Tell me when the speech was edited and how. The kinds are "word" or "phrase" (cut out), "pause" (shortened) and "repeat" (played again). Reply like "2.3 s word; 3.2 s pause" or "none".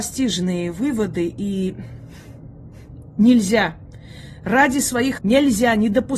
5.2 s word

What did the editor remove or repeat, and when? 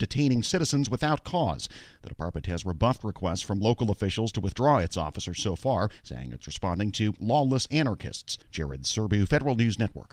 8.4 s pause

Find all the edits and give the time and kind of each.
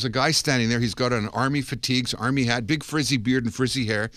none

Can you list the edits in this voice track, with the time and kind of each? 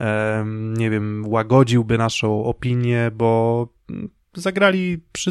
none

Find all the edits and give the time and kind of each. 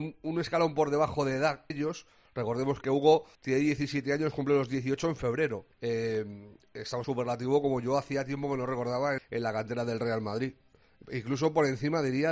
1.7 s word; 2.8 s word; 3.3 s pause; 5.7 s pause; 7.0 s phrase; 9.2 s word

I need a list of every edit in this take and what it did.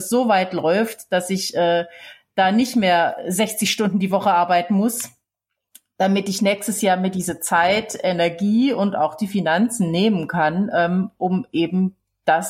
none

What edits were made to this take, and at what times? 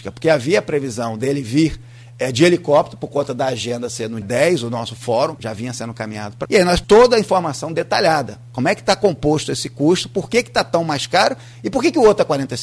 4.2 s word; 5.4 s word; 6.5 s word; 6.8 s word

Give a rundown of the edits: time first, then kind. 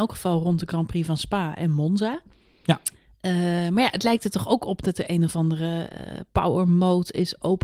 none

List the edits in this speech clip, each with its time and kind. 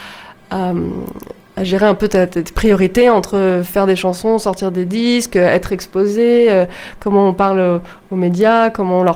none

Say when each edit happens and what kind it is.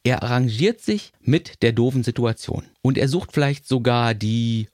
1.1 s pause; 2.7 s pause

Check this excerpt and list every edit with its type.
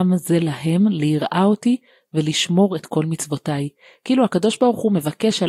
none

